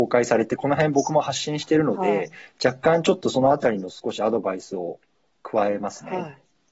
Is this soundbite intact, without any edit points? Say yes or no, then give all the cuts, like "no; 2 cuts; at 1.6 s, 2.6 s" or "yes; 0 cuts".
yes; 0 cuts